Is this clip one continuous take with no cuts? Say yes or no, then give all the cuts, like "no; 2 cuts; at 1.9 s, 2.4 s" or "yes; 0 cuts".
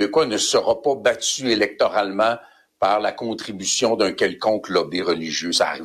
yes; 0 cuts